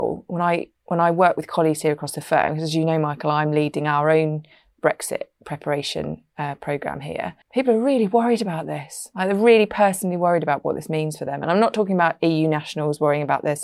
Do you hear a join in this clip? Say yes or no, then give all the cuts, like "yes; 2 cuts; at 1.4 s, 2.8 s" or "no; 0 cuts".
yes; 1 cut; at 7.4 s